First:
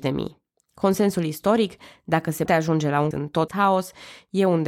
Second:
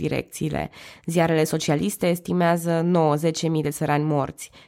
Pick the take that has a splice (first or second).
first